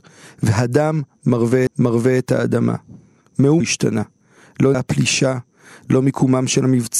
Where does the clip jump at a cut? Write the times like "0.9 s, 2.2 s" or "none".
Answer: 1.7 s, 3.6 s, 4.7 s